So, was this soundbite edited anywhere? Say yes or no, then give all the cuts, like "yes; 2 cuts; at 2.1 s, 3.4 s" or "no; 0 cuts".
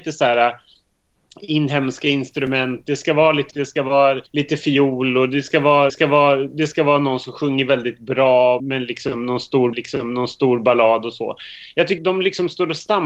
yes; 6 cuts; at 3.5 s, 4.3 s, 5.9 s, 8.6 s, 9.7 s, 12.0 s